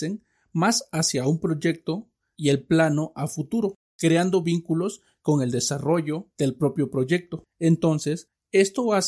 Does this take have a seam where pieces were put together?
no; 0 cuts

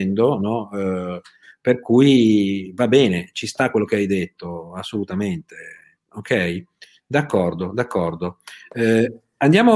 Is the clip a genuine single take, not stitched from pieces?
yes; 0 cuts

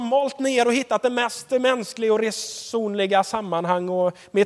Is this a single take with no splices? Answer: yes; 0 cuts

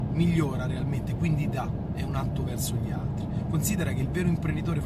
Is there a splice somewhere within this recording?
no; 0 cuts

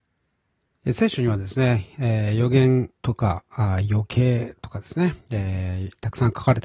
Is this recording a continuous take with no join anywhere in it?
no; 2 cuts; at 3.0 s, 5.2 s

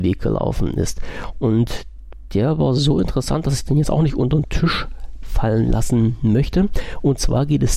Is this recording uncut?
yes; 0 cuts

